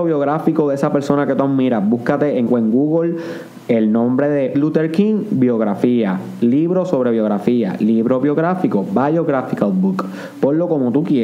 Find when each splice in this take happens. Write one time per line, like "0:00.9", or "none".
0:02.5
0:04.5

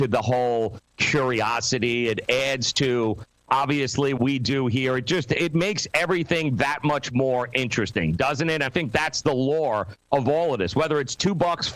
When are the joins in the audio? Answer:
0:04.2
0:08.7

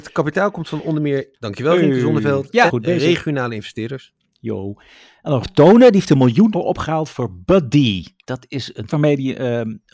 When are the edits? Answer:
0:01.3
0:02.7
0:05.4
0:06.5
0:08.9

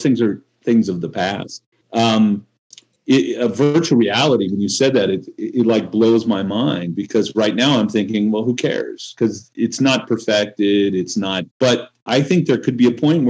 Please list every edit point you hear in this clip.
0:01.8
0:11.5

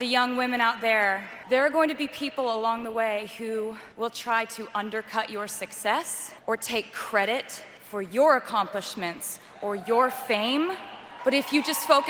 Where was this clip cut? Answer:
0:03.9
0:06.4
0:07.8

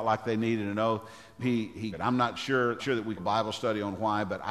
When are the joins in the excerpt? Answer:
0:01.4
0:01.9
0:02.8
0:03.2

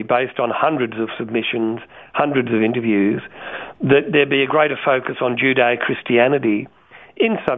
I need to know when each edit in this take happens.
none

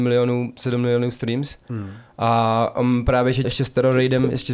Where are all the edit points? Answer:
0:03.4

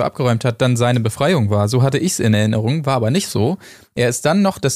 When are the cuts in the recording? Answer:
none

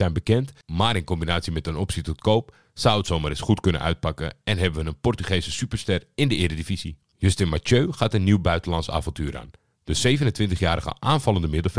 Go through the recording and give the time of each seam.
none

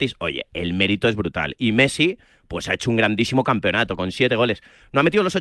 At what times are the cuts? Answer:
none

